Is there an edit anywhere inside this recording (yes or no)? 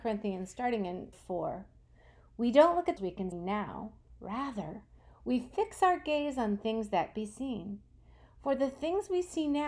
yes